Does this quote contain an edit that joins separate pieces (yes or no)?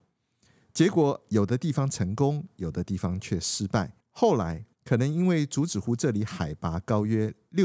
yes